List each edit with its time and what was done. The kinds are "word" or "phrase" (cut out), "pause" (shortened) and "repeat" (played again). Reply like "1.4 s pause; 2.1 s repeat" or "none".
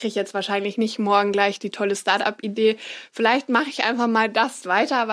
none